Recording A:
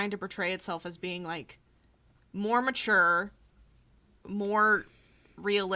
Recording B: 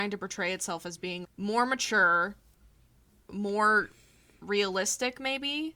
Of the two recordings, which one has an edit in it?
B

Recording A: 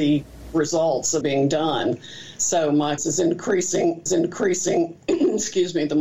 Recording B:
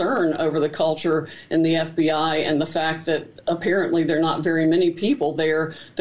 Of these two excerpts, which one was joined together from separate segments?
A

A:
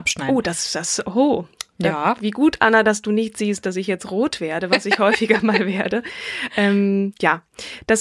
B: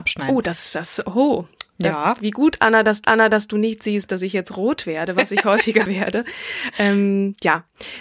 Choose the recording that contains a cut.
B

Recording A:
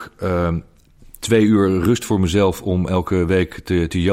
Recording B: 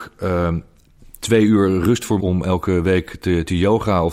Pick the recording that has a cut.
B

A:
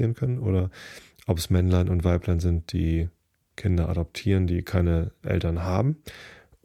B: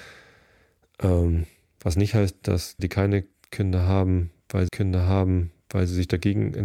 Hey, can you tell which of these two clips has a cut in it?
B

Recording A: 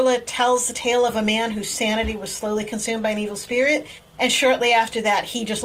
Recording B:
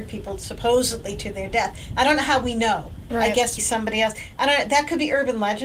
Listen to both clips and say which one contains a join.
B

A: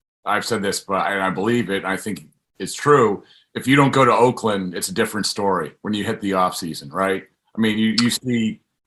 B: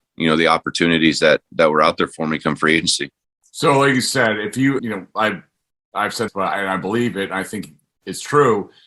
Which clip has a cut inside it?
B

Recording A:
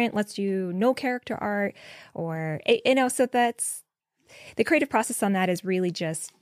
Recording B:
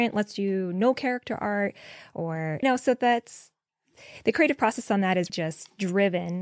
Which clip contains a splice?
B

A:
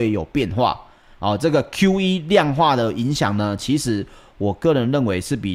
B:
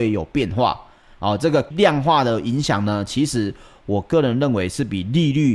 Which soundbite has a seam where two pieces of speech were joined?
B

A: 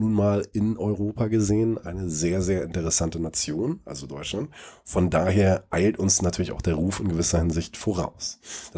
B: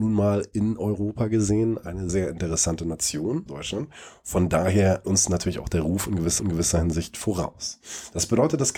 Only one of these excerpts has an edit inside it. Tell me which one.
B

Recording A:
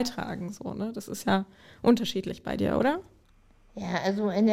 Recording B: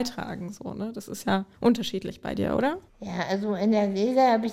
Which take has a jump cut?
B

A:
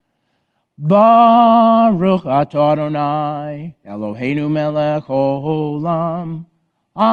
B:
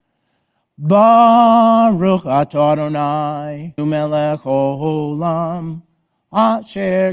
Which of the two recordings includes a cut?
B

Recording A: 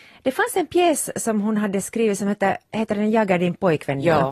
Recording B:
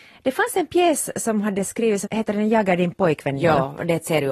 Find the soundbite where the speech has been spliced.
B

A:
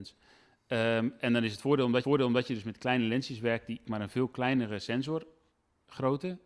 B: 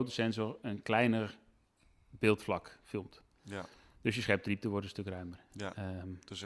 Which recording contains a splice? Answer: A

